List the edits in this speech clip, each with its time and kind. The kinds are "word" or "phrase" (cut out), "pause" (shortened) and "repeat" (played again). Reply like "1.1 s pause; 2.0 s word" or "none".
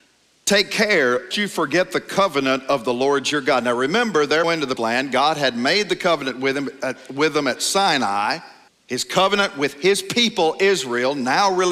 1.3 s word; 4.4 s phrase; 4.8 s word; 8.7 s pause